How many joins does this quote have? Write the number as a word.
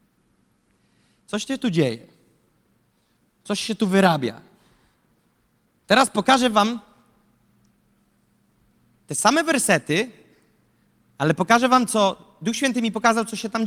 zero